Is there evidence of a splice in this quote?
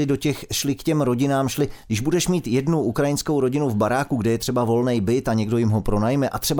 no; 0 cuts

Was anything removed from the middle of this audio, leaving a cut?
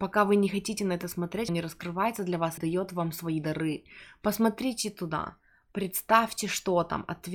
yes; 2 cuts; at 1.5 s, 2.6 s

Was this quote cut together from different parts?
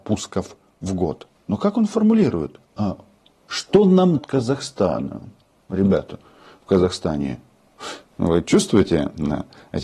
yes; 1 cut; at 4.1 s

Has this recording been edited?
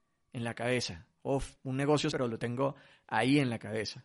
yes; 2 cuts; at 1.6 s, 2.1 s

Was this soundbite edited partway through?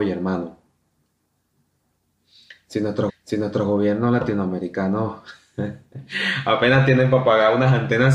yes; 1 cut; at 3.1 s

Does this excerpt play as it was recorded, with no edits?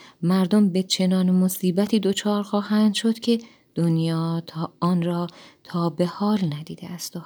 yes; 0 cuts

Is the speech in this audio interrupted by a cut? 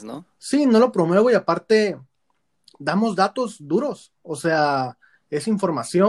no; 0 cuts

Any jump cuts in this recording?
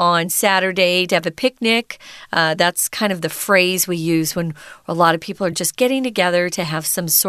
no; 0 cuts

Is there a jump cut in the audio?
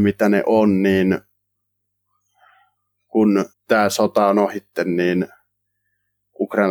yes; 1 cut; at 3.5 s

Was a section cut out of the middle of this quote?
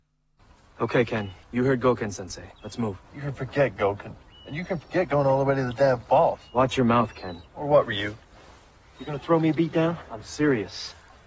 yes; 5 cuts; at 1.4 s, 2.6 s, 3.0 s, 4.3 s, 7.5 s

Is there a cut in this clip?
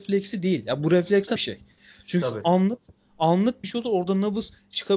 yes; 3 cuts; at 1.4 s, 2.2 s, 3.6 s

